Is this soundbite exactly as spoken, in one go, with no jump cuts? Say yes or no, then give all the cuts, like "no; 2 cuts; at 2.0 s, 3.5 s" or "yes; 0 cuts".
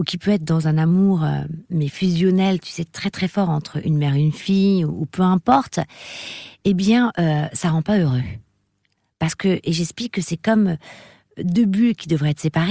yes; 0 cuts